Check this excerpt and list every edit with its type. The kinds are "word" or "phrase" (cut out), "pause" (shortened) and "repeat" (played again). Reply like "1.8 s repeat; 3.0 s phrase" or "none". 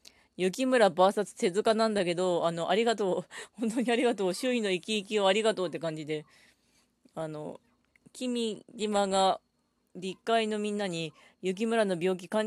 none